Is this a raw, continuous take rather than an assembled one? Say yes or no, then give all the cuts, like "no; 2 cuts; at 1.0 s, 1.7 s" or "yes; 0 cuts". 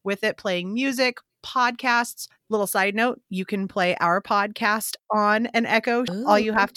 yes; 0 cuts